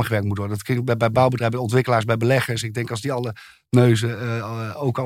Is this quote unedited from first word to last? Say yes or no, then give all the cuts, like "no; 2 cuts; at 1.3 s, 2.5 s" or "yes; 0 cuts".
yes; 0 cuts